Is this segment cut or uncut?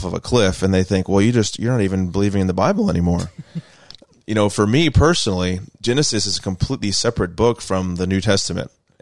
uncut